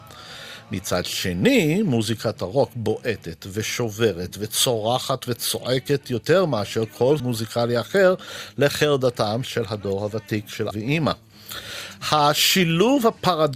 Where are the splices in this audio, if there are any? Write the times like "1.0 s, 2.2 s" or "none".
7.2 s, 9.4 s, 10.7 s